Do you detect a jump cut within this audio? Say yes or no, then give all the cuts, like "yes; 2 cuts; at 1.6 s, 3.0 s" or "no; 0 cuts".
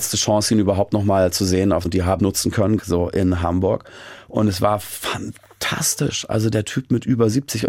yes; 3 cuts; at 1.8 s, 2.2 s, 2.8 s